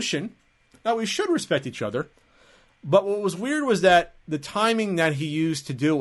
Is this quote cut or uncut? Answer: uncut